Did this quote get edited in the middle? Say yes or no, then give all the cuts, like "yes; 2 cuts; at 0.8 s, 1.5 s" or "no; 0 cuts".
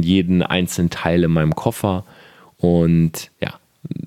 no; 0 cuts